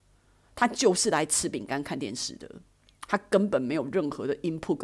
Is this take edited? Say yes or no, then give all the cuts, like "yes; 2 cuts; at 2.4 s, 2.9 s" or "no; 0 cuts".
no; 0 cuts